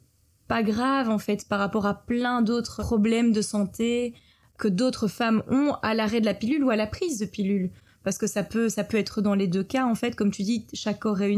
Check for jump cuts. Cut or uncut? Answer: uncut